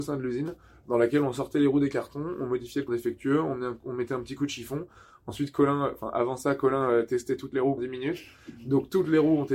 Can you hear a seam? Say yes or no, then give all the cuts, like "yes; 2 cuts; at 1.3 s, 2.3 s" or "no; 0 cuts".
yes; 2 cuts; at 2.9 s, 7.8 s